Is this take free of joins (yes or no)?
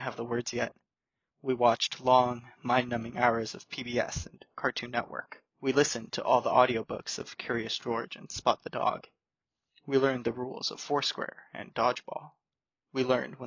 no